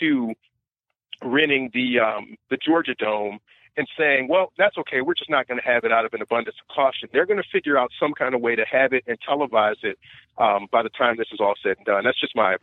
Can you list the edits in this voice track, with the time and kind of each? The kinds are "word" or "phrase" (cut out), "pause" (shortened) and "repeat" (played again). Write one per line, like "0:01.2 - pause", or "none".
none

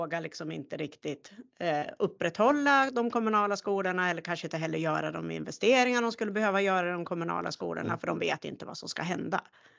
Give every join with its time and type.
none

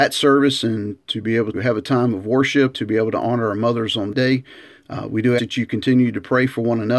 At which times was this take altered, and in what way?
0:01.5 - word
0:02.7 - word
0:04.1 - word
0:05.4 - word

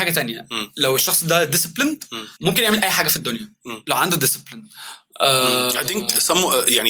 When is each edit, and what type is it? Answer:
0:02.4 - pause

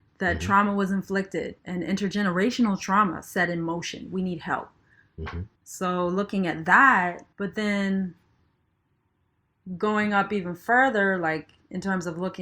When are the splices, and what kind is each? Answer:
0:01.6 - pause
0:05.6 - pause
0:07.3 - pause

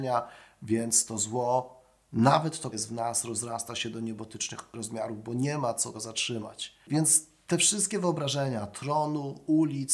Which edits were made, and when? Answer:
0:02.7 - word
0:05.9 - word

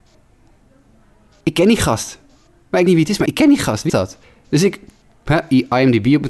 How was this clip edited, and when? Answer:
0:02.4 - pause
0:02.9 - phrase
0:03.3 - word
0:03.9 - word
0:04.2 - pause

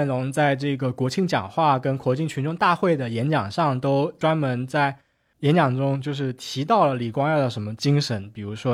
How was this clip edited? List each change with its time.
none

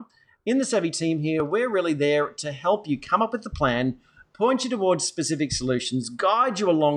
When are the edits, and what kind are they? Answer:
none

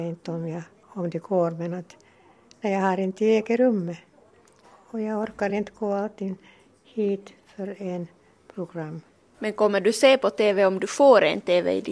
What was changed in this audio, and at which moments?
none

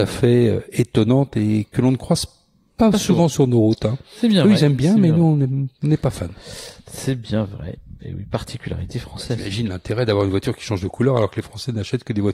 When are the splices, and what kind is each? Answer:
none

